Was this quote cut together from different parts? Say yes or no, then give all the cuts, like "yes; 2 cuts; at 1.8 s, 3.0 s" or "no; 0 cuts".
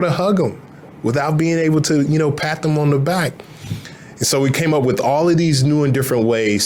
no; 0 cuts